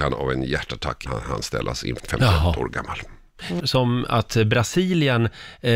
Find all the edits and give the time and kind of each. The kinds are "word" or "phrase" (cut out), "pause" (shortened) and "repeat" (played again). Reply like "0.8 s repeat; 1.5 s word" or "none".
1.1 s word; 2.0 s word; 3.6 s phrase